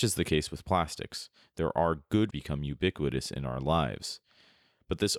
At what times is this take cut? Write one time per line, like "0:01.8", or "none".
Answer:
0:02.3